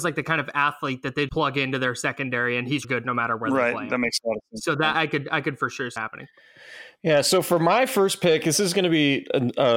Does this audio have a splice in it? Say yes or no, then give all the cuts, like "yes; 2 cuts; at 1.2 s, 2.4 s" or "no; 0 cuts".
yes; 4 cuts; at 1.3 s, 2.8 s, 4.9 s, 6.0 s